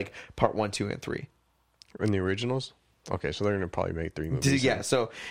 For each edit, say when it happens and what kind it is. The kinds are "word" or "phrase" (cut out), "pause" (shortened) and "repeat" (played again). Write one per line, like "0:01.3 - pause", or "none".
none